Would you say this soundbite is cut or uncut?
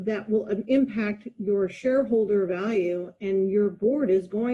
uncut